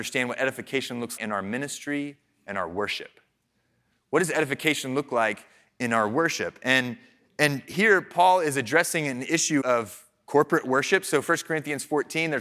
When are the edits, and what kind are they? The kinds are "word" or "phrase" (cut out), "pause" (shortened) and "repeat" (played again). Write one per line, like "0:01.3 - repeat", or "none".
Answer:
0:01.2 - word
0:09.6 - word